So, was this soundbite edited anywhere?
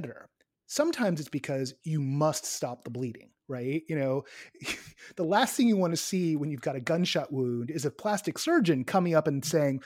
no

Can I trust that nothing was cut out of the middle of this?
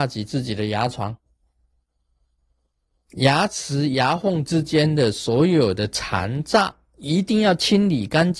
yes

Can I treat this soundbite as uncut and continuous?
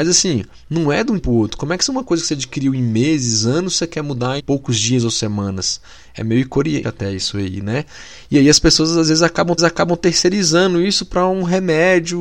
no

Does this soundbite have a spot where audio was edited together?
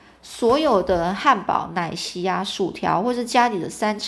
no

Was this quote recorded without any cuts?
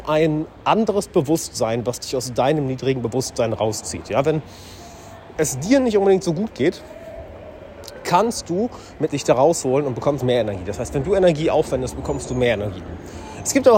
no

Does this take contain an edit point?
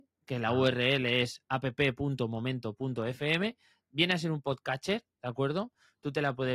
no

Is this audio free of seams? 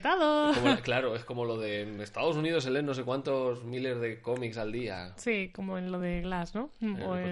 yes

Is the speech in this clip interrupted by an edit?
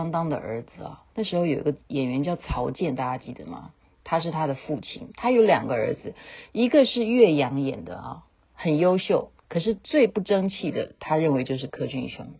yes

